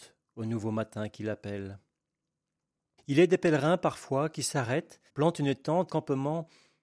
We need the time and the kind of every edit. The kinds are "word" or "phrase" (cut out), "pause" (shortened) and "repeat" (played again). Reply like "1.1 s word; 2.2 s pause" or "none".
5.1 s pause; 5.9 s word